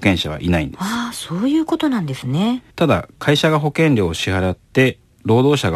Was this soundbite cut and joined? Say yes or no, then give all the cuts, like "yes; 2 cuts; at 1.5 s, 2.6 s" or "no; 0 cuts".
yes; 1 cut; at 2.7 s